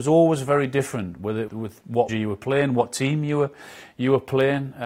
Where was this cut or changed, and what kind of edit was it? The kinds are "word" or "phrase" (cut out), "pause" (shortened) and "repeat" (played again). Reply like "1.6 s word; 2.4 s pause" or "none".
1.5 s word; 2.1 s word